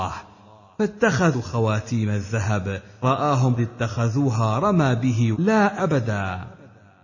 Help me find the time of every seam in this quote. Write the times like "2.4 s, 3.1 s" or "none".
1.3 s, 3.0 s, 3.6 s, 5.3 s, 5.8 s